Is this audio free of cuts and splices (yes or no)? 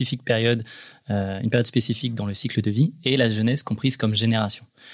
yes